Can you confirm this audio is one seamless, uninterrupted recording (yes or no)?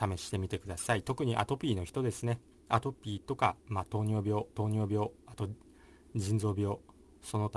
no